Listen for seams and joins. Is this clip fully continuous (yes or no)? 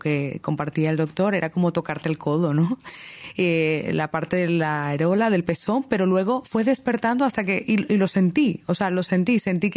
yes